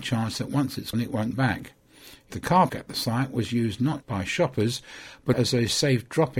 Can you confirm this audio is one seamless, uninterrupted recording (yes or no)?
no